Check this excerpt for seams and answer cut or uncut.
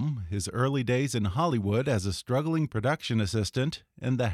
uncut